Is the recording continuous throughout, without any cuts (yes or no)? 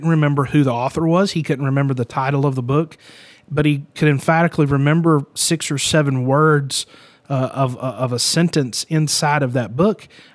yes